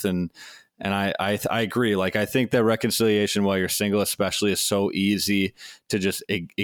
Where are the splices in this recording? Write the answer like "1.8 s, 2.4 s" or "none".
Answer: none